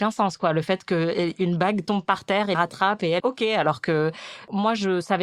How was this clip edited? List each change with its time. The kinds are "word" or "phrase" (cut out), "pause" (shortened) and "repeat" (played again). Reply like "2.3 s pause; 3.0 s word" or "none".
2.5 s word; 3.2 s phrase

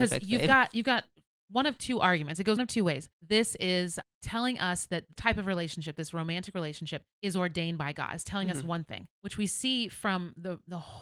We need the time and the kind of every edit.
2.6 s word; 3.1 s pause; 4.0 s word; 5.2 s word; 7.1 s pause; 9.1 s pause

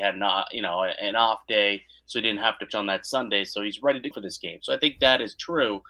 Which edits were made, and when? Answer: 2.7 s word; 4.1 s word

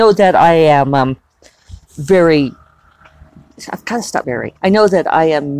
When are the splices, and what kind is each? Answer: 1.9 s pause; 4.2 s word; 4.6 s pause

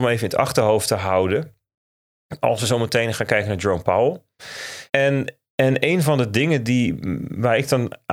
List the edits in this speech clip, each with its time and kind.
4.9 s pause

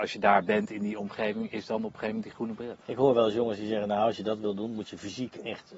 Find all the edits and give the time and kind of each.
2.8 s pause

